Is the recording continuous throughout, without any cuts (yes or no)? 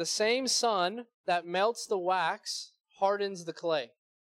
yes